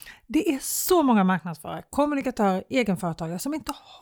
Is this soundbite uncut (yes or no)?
yes